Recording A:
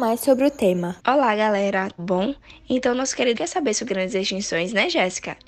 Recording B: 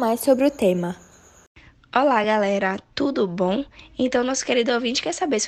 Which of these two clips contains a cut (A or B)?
A